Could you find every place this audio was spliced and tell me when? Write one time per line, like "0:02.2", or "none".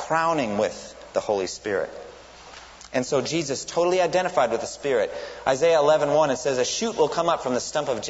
none